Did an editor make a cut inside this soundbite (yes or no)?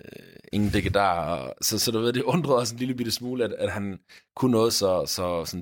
no